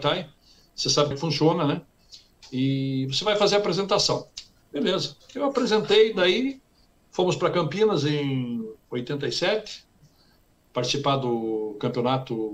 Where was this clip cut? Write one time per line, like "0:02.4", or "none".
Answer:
0:01.1